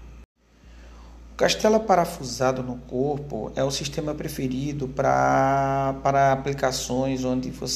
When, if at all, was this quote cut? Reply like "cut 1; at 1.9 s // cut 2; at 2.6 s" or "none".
none

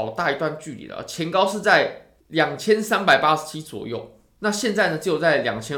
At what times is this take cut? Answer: cut 1; at 2.2 s

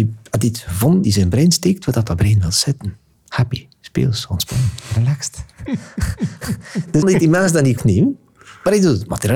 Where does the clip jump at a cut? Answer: cut 1; at 1.0 s // cut 2; at 3.1 s // cut 3; at 7.0 s // cut 4; at 7.8 s

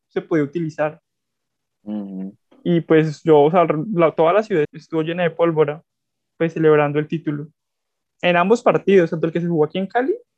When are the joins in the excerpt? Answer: cut 1; at 4.6 s

